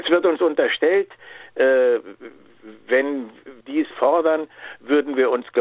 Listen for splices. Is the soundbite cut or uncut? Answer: cut